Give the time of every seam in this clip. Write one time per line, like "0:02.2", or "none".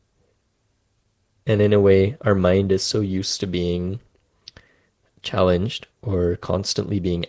0:05.9